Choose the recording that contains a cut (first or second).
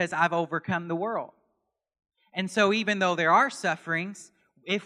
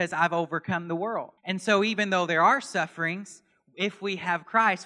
second